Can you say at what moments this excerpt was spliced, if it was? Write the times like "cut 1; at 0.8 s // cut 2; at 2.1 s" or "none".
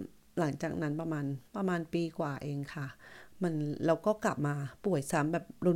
cut 1; at 1.5 s